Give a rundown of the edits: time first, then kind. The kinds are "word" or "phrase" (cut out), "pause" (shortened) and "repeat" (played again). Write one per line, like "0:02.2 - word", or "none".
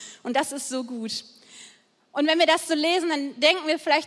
none

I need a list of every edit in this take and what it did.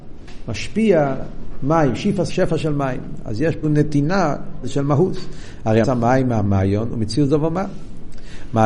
0:02.3 - word
0:03.6 - word
0:04.6 - word
0:05.8 - word

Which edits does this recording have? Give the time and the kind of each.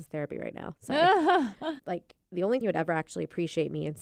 0:01.8 - word
0:02.2 - pause
0:02.6 - word

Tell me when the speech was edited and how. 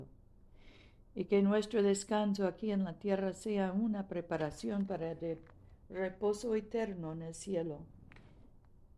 none

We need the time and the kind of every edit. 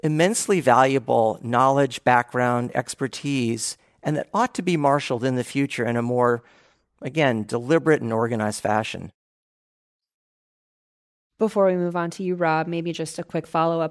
none

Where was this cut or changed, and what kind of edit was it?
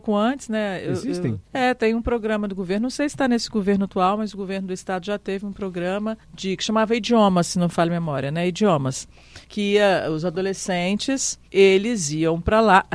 0:01.5 - pause
0:06.2 - pause
0:09.4 - pause
0:11.5 - pause

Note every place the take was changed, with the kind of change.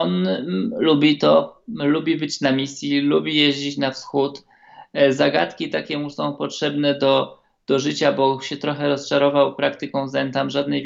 none

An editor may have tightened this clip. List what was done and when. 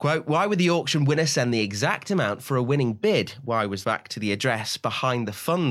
0:03.8 - phrase

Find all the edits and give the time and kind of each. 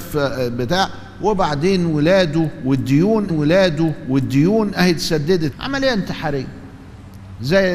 0:03.3 - repeat
0:05.5 - phrase

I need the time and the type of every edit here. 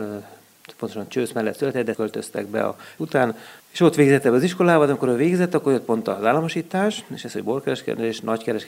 0:01.9 - word
0:03.0 - word

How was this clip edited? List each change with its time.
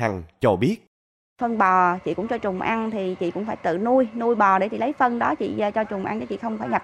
none

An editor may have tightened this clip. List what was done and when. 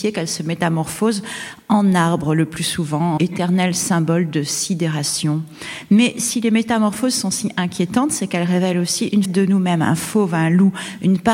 0:03.2 - word
0:09.2 - word

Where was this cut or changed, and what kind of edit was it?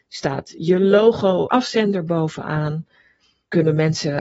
0:01.5 - word

